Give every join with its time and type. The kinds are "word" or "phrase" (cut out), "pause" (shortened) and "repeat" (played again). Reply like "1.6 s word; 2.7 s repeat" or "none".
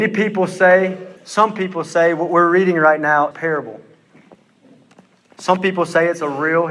1.2 s pause; 3.3 s phrase